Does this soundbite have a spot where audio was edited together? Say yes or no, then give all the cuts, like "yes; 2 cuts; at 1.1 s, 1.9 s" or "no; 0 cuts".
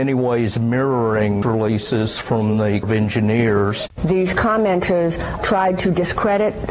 yes; 3 cuts; at 1.4 s, 2.8 s, 5.4 s